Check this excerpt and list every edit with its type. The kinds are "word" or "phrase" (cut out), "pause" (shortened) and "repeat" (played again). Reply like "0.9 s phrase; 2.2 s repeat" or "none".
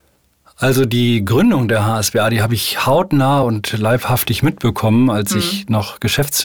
none